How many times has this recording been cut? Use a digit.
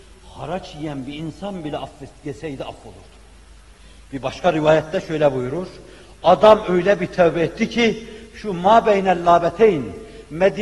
0